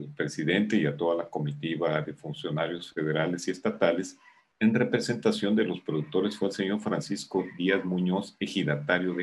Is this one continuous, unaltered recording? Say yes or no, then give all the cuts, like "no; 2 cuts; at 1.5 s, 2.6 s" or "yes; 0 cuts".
yes; 0 cuts